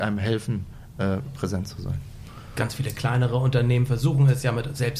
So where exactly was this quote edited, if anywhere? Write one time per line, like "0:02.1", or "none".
none